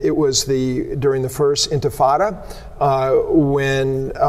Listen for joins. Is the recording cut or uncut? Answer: uncut